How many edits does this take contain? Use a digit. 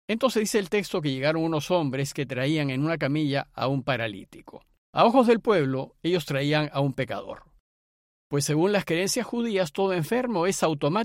1